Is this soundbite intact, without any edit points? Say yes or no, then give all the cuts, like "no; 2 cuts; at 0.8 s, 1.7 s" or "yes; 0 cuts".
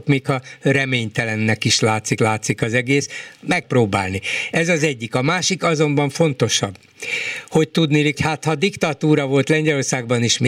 no; 3 cuts; at 2.2 s, 3.6 s, 8.1 s